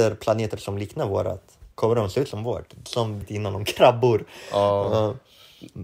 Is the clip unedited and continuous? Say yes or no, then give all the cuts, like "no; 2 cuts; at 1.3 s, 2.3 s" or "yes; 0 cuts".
no; 2 cuts; at 1.7 s, 3.2 s